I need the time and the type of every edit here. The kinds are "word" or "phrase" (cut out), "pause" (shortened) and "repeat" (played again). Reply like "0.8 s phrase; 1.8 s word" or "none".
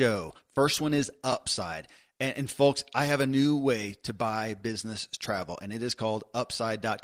none